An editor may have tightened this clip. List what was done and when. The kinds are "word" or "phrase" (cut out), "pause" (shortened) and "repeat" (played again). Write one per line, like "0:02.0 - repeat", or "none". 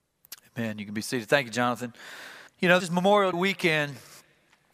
0:02.5 - pause
0:02.8 - word
0:03.3 - word